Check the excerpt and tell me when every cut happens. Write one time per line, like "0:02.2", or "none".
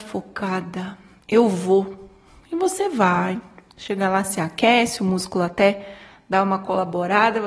none